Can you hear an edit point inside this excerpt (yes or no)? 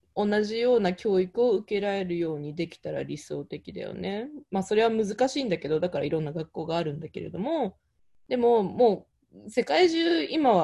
no